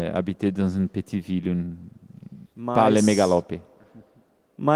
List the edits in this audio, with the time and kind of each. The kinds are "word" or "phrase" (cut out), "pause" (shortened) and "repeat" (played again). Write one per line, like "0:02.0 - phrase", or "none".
0:02.4 - pause